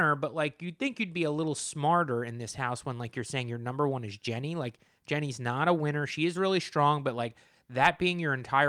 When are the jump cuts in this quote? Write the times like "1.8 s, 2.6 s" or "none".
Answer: none